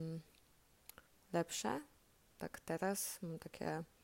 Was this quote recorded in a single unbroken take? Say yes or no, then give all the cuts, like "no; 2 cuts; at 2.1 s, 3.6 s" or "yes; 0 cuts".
no; 1 cut; at 1.1 s